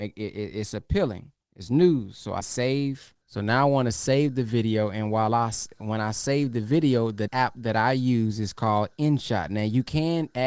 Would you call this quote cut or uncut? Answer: cut